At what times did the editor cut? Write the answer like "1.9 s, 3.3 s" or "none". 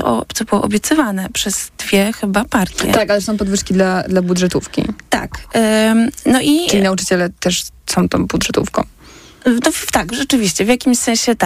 none